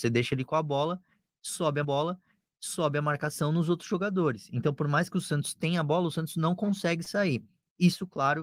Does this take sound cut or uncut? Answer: cut